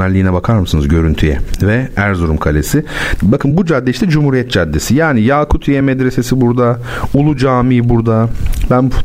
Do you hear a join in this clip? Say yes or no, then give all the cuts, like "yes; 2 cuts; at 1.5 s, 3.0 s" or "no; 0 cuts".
no; 0 cuts